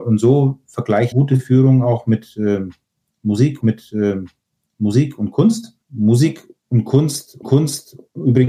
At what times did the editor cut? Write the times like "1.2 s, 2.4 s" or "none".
1.1 s, 3.6 s, 5.8 s, 7.4 s